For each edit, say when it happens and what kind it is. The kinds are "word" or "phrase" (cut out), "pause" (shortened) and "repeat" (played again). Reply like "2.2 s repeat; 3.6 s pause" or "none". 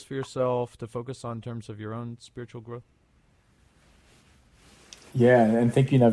none